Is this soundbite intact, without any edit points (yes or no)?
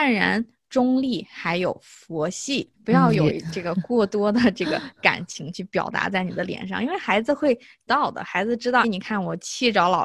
no